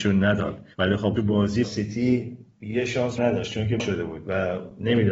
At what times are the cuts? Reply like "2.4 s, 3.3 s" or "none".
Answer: 1.2 s, 1.6 s, 3.2 s, 3.8 s